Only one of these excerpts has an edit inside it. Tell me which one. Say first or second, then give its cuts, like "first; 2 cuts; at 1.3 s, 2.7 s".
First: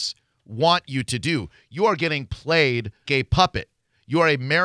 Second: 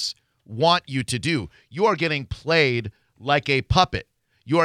first; 1 cut; at 3.1 s